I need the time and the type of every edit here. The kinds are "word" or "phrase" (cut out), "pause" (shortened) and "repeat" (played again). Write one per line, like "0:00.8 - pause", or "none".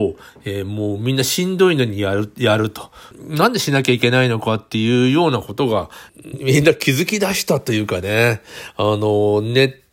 0:06.3 - word